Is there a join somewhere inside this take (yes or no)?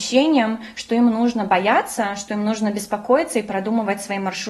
no